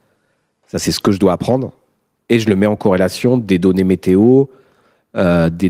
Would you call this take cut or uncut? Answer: uncut